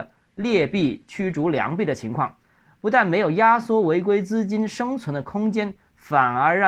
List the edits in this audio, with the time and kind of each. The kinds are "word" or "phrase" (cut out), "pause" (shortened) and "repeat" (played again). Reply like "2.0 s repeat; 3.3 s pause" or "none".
none